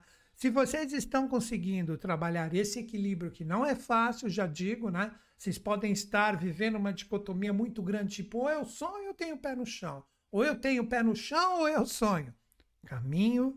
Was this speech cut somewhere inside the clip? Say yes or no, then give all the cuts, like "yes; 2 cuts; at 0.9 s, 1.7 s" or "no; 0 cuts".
no; 0 cuts